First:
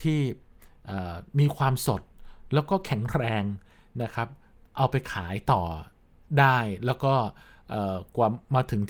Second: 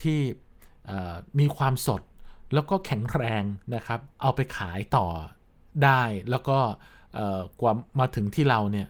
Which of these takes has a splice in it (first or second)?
second